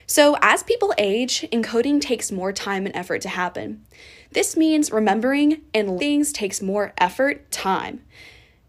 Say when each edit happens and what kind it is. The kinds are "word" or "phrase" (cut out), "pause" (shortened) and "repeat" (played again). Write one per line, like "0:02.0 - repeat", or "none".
0:06.0 - word
0:07.5 - word